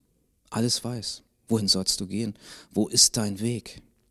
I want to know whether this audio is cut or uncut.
uncut